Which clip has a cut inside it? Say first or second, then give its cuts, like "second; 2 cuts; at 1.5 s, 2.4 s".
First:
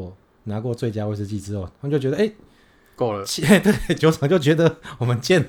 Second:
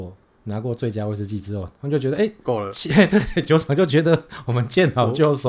second; 1 cut; at 2.4 s